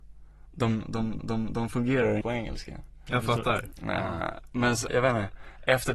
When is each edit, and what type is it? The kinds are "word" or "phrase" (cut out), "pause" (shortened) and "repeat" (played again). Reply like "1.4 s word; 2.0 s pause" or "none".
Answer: 1.2 s repeat; 2.2 s word; 4.9 s word